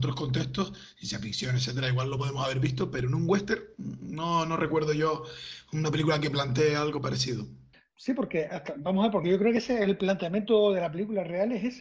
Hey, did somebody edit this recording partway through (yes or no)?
no